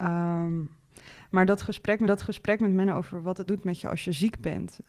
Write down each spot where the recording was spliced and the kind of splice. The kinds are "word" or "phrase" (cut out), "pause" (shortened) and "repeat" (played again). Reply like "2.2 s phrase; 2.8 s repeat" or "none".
2.1 s repeat; 3.5 s word